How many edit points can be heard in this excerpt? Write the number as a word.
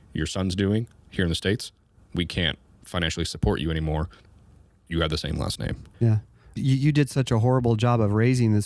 three